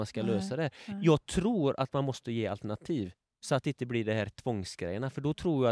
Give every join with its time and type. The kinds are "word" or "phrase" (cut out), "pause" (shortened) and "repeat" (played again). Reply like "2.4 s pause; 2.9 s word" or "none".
none